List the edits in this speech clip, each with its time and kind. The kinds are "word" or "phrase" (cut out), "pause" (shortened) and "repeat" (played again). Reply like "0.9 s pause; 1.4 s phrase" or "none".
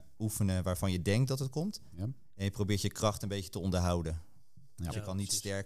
none